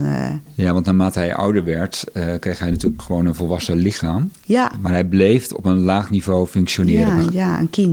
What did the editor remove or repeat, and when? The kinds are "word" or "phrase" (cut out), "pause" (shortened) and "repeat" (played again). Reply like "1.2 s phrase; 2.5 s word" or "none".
none